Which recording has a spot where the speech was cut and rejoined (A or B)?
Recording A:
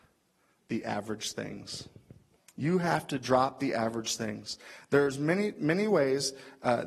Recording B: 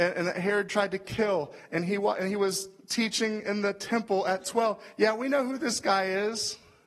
A